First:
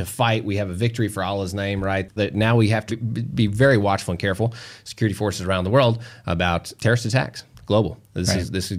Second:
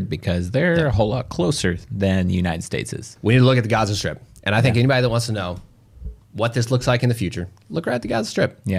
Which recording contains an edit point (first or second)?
first